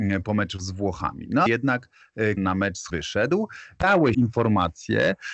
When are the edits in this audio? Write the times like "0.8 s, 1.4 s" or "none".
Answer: 1.5 s, 2.4 s, 2.9 s, 4.1 s